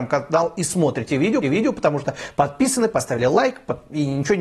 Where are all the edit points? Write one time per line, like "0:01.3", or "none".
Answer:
0:01.4